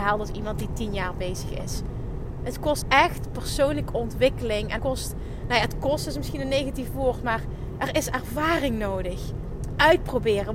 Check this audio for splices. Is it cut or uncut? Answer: cut